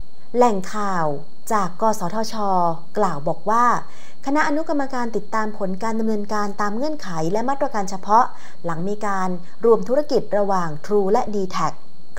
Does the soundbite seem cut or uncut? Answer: uncut